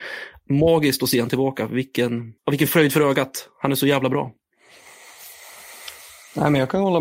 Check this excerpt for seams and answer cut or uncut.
cut